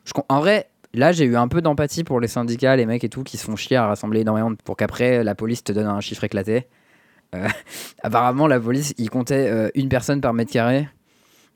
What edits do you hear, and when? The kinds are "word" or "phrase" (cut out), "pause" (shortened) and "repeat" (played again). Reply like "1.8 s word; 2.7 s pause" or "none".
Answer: 4.6 s word